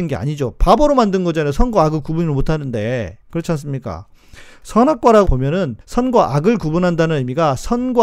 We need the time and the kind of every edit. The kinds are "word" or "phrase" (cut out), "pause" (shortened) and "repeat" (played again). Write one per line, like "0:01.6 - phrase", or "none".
0:03.2 - pause
0:05.2 - phrase
0:05.8 - pause